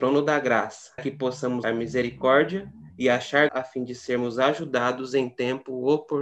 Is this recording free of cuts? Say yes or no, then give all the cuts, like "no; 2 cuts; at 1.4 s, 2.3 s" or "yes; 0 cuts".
no; 4 cuts; at 1.0 s, 1.6 s, 2.9 s, 3.5 s